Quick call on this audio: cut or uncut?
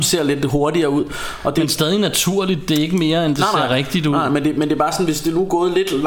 uncut